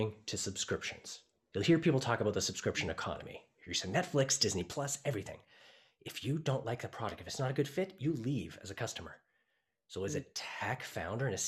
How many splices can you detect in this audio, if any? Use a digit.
0